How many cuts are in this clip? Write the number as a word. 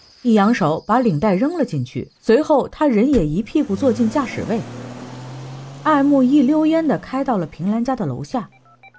one